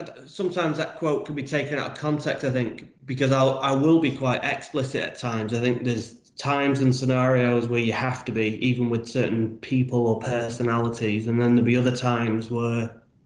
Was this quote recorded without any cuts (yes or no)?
yes